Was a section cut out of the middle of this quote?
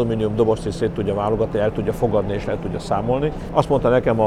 no; 0 cuts

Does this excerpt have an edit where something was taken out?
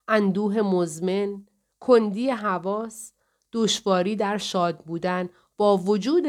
no; 0 cuts

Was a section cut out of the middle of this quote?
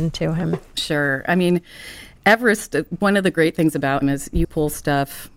yes; 2 cuts; at 4.0 s, 4.4 s

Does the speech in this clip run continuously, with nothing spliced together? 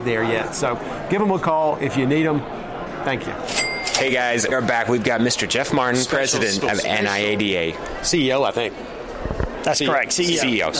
no; 2 cuts; at 4.5 s, 6.6 s

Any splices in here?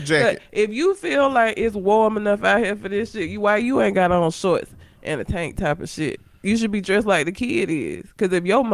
no; 0 cuts

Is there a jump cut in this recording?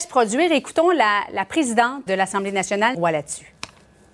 yes; 2 cuts; at 2.1 s, 2.9 s

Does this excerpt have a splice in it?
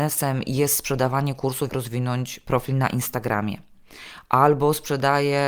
yes; 1 cut; at 1.7 s

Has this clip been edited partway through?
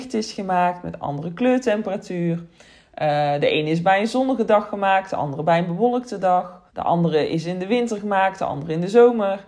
yes; 1 cut; at 6.7 s

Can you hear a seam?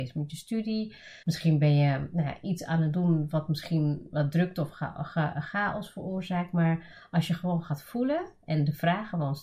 yes; 1 cut; at 1.2 s

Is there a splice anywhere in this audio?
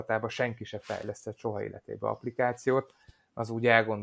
no; 0 cuts

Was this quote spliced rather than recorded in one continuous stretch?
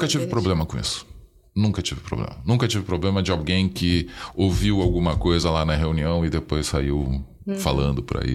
no; 0 cuts

